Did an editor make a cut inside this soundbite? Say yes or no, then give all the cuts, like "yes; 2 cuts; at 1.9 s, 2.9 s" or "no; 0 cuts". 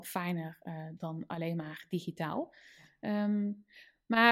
no; 0 cuts